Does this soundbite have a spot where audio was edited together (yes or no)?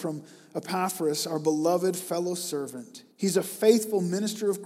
yes